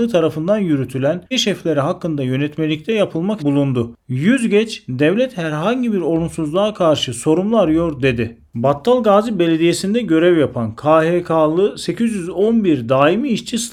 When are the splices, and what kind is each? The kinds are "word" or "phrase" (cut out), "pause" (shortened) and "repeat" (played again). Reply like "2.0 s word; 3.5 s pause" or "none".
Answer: 1.3 s word; 3.4 s phrase; 8.5 s pause